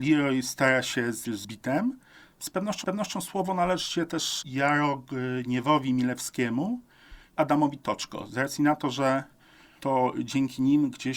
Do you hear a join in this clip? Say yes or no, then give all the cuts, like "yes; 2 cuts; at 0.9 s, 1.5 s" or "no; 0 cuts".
yes; 3 cuts; at 1.2 s, 2.8 s, 7.4 s